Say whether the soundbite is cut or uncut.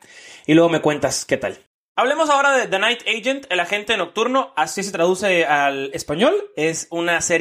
uncut